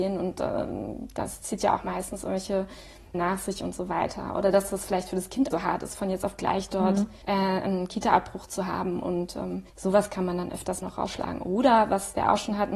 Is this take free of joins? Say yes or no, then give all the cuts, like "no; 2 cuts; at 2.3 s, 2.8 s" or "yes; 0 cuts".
no; 5 cuts; at 3.1 s, 5.5 s, 7.2 s, 9.7 s, 10.8 s